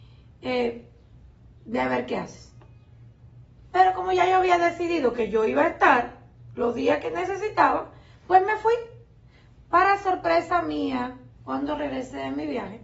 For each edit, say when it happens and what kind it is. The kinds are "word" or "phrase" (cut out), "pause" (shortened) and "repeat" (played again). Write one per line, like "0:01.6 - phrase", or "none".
0:01.6 - pause